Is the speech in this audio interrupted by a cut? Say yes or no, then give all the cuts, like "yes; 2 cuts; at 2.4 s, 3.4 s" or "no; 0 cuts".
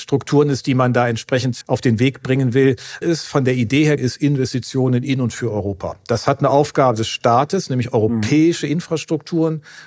yes; 3 cuts; at 1.6 s, 3.0 s, 4.0 s